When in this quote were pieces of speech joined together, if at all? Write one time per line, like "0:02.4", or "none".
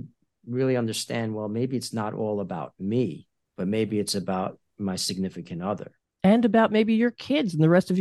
0:03.4
0:06.0

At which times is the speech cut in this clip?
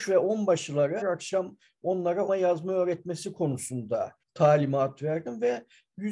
0:01.0
0:02.3
0:04.2

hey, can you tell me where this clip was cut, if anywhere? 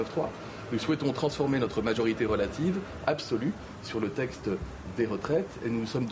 0:03.0

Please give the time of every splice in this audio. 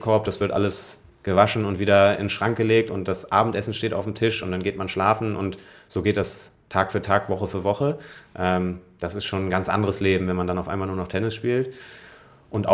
none

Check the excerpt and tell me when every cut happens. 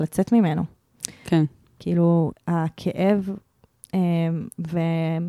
0:02.3

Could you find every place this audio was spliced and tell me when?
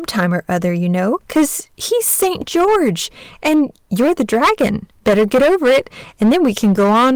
none

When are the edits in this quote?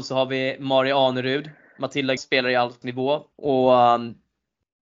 0:02.2
0:02.8
0:03.3

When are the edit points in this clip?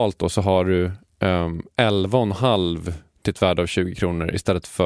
0:03.1

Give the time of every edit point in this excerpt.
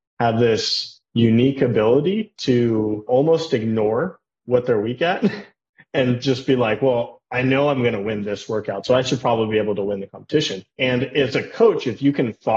none

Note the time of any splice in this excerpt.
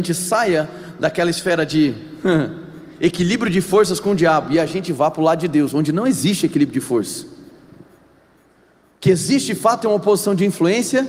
none

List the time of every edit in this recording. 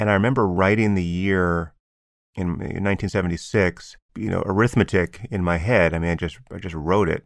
0:04.1

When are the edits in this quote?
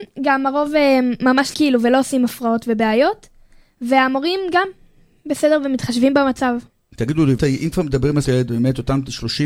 0:01.5
0:07.4
0:08.2

